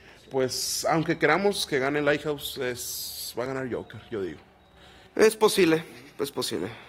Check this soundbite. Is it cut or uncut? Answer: uncut